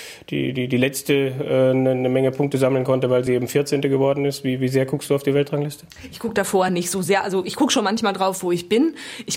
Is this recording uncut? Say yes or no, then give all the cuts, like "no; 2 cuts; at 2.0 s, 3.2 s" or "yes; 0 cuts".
yes; 0 cuts